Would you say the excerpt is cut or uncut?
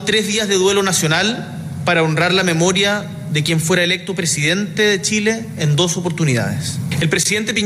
uncut